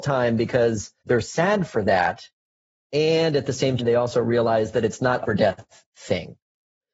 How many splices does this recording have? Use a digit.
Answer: 3